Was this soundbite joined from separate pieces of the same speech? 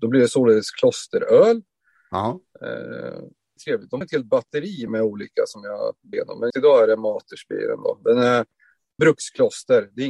yes; 6 cuts; at 3.6 s, 4.0 s, 4.9 s, 6.1 s, 6.5 s, 9.0 s

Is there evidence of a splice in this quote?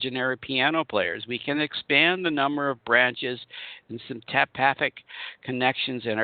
no; 0 cuts

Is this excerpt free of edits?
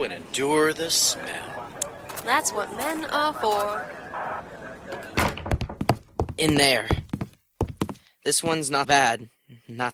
no; 1 cut; at 8.8 s

